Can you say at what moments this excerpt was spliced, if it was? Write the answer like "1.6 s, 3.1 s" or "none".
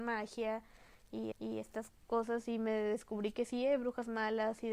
1.3 s